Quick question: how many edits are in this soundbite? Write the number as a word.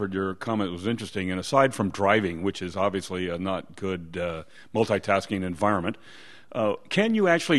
zero